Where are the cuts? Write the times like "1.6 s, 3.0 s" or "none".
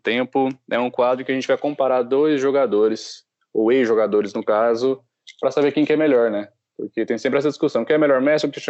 none